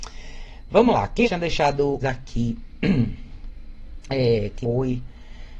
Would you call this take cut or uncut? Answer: cut